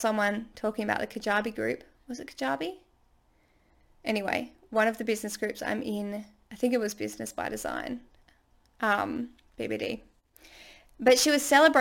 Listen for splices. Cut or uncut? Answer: uncut